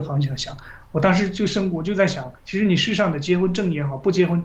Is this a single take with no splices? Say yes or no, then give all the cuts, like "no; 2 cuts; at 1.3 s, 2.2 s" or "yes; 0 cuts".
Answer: no; 1 cut; at 2.4 s